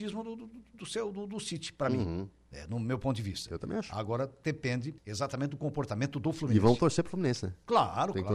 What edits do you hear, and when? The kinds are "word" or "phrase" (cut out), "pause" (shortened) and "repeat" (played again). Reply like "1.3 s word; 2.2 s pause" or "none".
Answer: 5.0 s pause